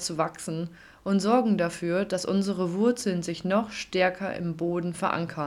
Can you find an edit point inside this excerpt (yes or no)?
no